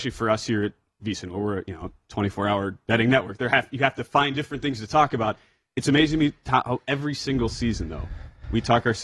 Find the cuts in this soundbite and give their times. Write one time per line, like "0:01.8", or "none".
none